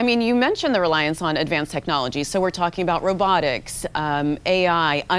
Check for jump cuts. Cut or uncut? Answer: uncut